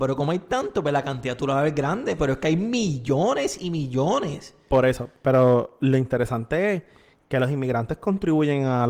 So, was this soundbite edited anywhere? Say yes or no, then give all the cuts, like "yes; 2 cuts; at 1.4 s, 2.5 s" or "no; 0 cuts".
no; 0 cuts